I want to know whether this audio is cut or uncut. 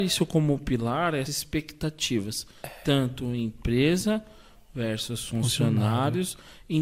cut